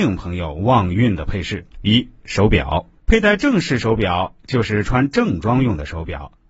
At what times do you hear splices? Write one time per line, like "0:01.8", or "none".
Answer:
0:01.7
0:03.0